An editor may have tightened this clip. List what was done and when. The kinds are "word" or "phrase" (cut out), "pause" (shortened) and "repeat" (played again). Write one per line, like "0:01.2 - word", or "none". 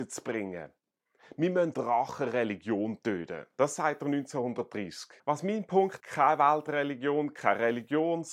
0:01.7 - phrase
0:05.2 - pause
0:06.0 - word

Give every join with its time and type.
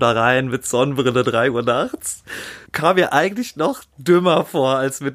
0:02.7 - pause

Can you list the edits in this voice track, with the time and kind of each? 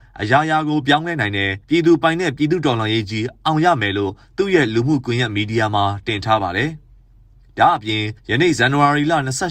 0:01.6 - pause
0:08.2 - pause

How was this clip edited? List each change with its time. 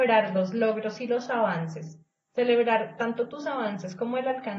none

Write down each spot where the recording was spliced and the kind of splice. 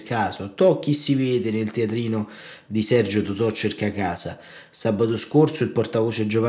none

